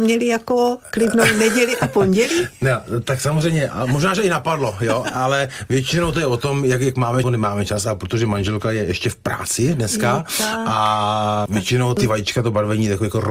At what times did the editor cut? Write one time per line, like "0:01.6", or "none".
0:05.0
0:07.2